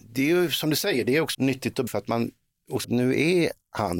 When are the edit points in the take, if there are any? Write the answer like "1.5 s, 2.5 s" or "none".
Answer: 1.3 s, 1.9 s, 2.8 s